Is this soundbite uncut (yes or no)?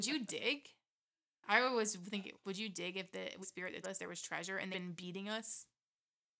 no